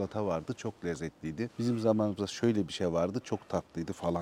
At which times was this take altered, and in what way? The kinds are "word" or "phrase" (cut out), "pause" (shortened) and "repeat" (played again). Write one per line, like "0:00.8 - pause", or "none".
none